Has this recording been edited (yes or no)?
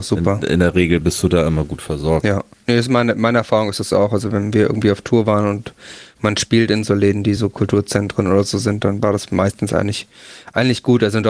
no